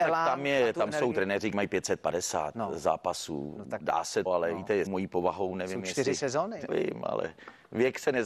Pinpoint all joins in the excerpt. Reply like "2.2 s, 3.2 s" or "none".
1.5 s, 4.3 s, 4.9 s, 6.7 s